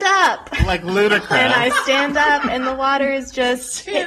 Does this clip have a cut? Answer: no; 0 cuts

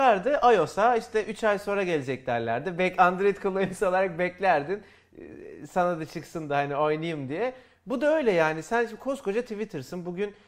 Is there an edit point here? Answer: no; 0 cuts

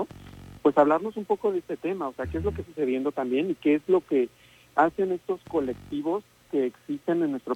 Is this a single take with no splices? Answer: no; 1 cut; at 2.6 s

